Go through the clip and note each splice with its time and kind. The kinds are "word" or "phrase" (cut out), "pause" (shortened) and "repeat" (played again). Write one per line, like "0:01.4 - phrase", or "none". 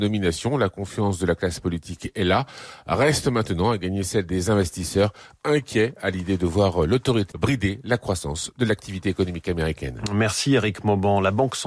0:07.3 - word